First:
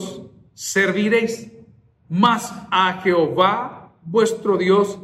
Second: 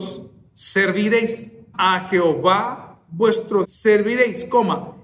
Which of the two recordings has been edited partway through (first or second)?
second